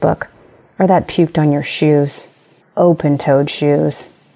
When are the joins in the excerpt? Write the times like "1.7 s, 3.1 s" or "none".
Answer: 1.1 s, 2.6 s